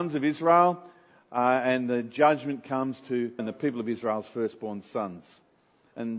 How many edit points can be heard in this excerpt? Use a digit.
1